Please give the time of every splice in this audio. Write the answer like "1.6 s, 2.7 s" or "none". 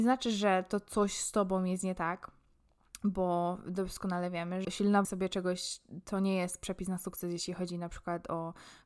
4.6 s, 5.0 s